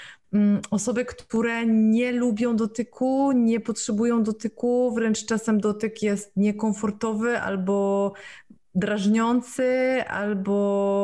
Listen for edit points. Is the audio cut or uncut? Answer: uncut